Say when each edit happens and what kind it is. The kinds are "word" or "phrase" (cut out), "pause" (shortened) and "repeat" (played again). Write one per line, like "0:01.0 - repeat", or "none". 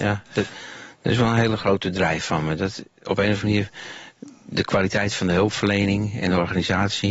none